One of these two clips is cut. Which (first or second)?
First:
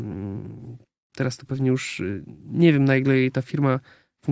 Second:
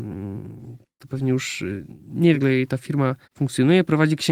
second